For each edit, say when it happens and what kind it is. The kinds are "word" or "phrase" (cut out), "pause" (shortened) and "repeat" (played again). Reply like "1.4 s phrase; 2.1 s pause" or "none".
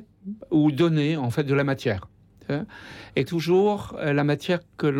3.3 s word